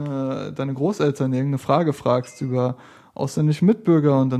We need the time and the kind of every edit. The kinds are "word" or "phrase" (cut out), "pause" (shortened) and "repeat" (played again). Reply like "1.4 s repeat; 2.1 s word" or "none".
none